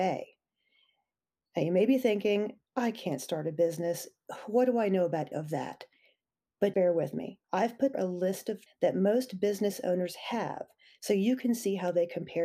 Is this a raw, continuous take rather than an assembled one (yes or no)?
no